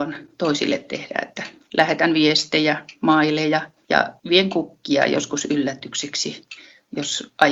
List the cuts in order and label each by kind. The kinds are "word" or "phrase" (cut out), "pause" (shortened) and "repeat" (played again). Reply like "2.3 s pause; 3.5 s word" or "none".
1.6 s word